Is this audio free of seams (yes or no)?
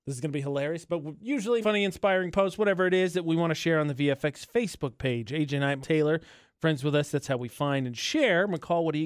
no